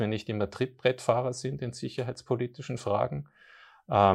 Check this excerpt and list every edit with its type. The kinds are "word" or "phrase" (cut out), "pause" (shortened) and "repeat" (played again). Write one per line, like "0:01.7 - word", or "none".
none